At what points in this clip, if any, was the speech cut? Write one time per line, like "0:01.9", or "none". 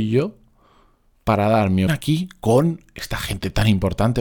0:01.9